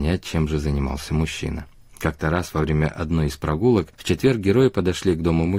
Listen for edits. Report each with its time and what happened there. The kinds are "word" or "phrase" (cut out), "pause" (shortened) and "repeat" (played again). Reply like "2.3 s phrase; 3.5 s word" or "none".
none